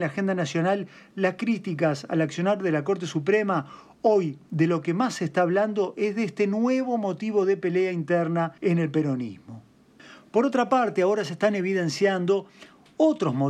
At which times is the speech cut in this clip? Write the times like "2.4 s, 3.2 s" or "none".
8.6 s